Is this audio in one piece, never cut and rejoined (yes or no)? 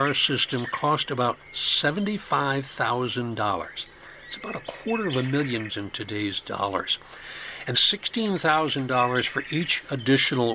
no